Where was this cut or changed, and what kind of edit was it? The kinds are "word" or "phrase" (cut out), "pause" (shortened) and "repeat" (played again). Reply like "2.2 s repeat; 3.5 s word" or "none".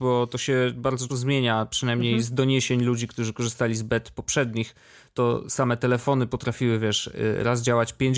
1.1 s word